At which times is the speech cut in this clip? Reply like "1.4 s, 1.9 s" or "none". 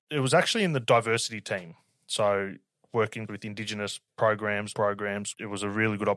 3.3 s, 4.7 s